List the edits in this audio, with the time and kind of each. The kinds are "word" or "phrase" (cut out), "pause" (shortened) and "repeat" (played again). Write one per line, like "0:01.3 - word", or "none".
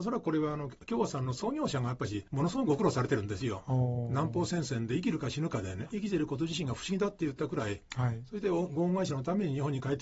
0:02.3 - pause
0:05.9 - phrase